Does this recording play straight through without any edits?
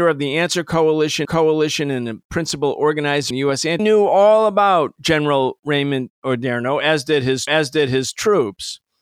no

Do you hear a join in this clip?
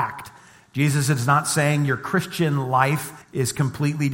yes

